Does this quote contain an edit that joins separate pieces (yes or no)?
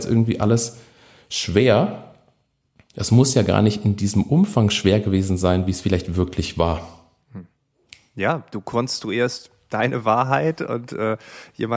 no